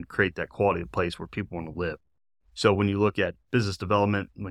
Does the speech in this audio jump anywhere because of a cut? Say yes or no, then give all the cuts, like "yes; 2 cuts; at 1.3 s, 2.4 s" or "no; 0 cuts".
no; 0 cuts